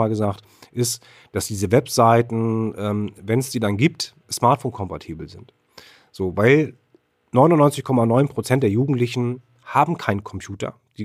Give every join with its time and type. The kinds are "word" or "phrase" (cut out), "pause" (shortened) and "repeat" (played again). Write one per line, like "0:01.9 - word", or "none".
0:04.2 - word